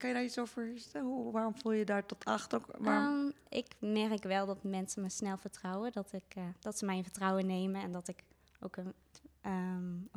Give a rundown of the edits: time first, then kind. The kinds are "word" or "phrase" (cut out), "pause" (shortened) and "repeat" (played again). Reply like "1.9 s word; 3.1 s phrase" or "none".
none